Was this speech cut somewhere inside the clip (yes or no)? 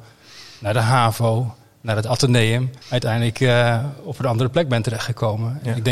yes